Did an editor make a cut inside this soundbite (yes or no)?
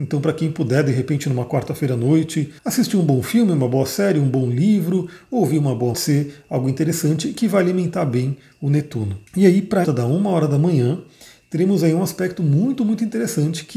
yes